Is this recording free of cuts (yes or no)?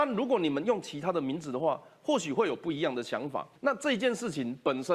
no